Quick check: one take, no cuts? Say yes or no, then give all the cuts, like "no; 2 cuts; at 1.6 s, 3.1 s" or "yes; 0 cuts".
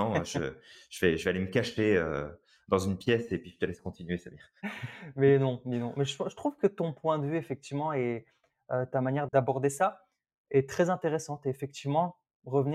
yes; 0 cuts